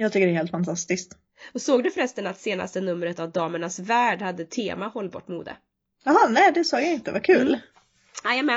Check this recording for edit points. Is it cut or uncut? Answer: uncut